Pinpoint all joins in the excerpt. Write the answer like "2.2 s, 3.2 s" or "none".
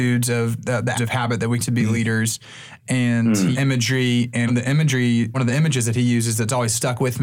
1.0 s, 1.6 s, 3.5 s, 4.5 s, 5.3 s